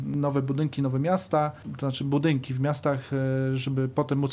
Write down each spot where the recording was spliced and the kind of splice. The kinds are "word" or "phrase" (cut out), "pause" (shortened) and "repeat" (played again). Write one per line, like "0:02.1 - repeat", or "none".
0:01.6 - word